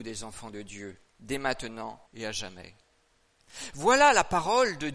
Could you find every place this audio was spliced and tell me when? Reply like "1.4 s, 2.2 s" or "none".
1.1 s, 2.1 s